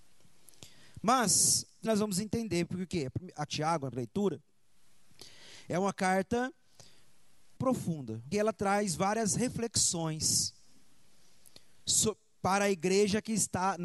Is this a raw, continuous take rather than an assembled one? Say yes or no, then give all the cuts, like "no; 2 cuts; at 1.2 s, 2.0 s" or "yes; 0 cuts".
no; 5 cuts; at 1.8 s, 3.5 s, 3.9 s, 7.6 s, 8.3 s